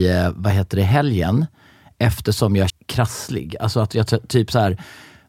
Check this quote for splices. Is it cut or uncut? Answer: cut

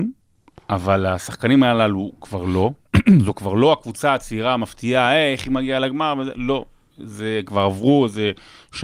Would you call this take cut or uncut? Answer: uncut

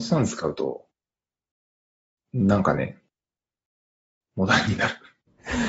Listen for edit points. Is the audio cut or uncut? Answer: uncut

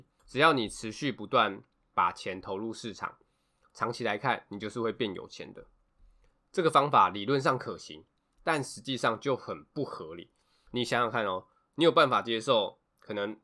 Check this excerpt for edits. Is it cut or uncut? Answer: uncut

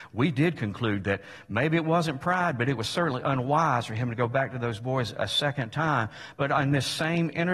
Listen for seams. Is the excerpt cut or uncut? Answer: uncut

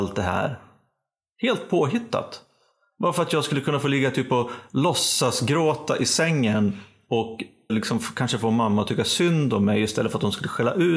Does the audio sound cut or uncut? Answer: cut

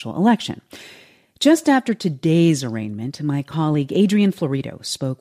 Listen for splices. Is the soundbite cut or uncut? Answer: uncut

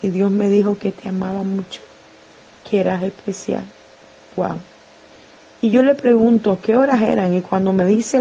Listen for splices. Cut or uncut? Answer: uncut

